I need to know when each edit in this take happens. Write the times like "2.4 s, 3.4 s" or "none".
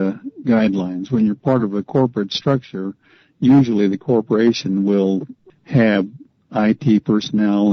none